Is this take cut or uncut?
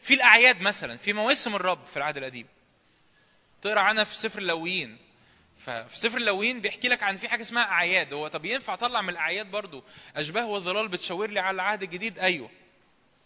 uncut